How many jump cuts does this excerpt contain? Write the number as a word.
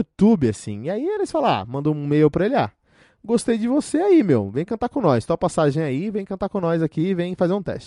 zero